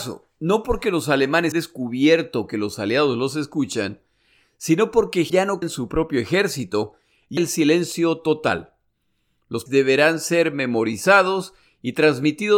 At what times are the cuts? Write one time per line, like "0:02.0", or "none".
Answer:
0:01.5
0:05.3
0:05.6
0:07.4
0:09.7